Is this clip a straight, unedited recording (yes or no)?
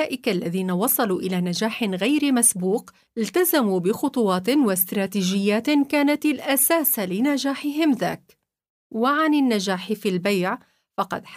yes